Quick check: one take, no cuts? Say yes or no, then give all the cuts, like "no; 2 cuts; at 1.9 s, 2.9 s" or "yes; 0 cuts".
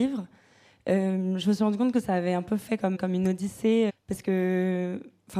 no; 2 cuts; at 2.9 s, 3.9 s